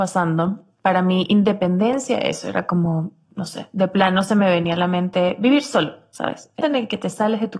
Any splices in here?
yes; 1 cut; at 6.6 s

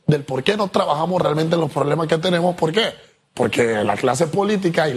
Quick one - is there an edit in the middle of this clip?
no; 0 cuts

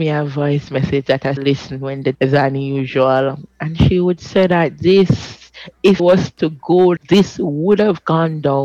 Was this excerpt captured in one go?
no; 4 cuts; at 1.4 s, 2.1 s, 6.0 s, 7.0 s

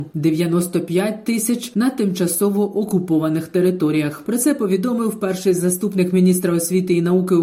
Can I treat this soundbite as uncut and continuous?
yes; 0 cuts

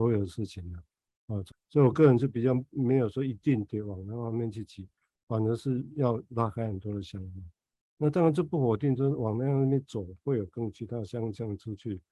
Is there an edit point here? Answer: yes; 1 cut; at 1.5 s

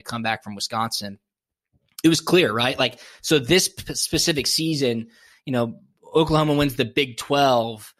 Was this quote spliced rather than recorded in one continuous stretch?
no; 0 cuts

